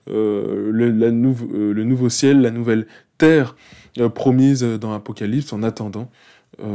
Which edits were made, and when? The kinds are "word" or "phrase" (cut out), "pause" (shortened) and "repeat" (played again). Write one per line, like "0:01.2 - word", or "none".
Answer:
none

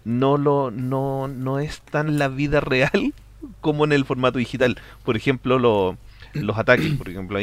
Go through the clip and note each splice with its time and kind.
0:02.1 - word

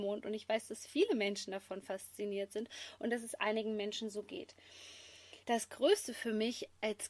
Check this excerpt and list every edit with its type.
0:05.4 - pause

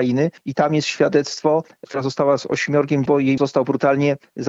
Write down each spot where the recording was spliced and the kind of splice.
0:01.8 - word
0:03.1 - word
0:03.4 - word

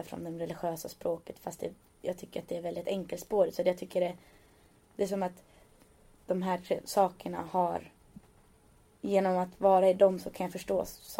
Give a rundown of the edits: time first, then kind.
none

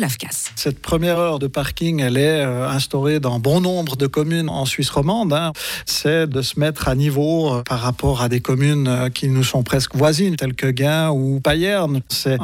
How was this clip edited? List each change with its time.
none

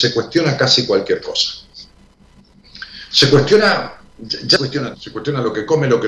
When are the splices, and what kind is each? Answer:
0:04.6 - word
0:04.9 - word

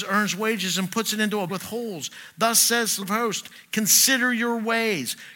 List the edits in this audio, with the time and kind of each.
0:01.5 - word
0:03.0 - word

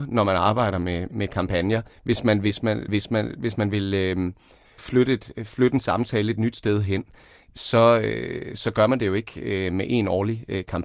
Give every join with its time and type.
0:01.1 - word
0:02.9 - repeat
0:04.8 - phrase

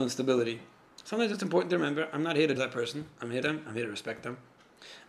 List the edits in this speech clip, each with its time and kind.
0:02.6 - word
0:03.4 - phrase

